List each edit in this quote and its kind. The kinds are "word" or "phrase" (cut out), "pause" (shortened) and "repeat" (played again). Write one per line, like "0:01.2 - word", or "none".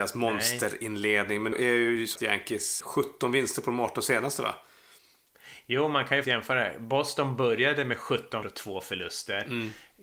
0:01.5 - word
0:02.2 - word
0:02.8 - word
0:06.2 - word
0:08.4 - word